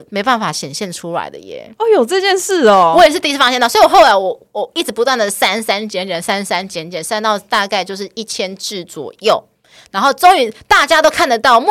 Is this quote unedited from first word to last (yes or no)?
yes